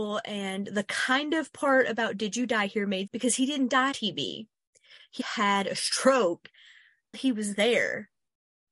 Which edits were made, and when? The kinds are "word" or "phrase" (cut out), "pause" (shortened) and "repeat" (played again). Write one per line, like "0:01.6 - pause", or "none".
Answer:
0:03.1 - word
0:03.9 - word
0:05.2 - word
0:07.1 - word